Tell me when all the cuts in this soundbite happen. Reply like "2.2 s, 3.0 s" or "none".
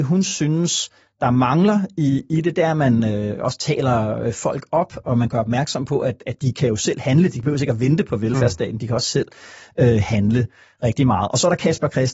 none